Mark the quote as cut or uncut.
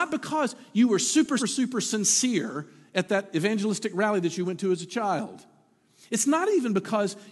cut